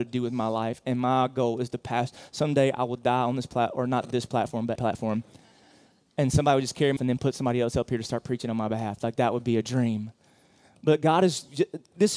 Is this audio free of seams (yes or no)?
no